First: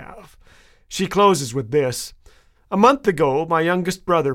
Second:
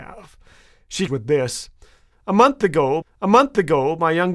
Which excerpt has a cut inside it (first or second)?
second